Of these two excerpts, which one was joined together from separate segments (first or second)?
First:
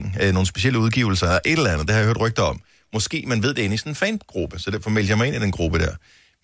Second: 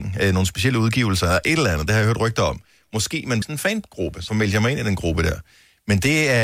second